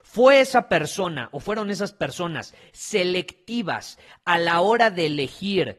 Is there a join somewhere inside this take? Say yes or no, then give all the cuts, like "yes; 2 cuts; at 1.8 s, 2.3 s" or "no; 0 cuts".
no; 0 cuts